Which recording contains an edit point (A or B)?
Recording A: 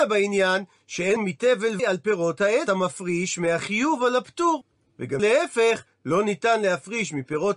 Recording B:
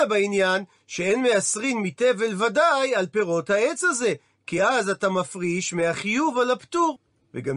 A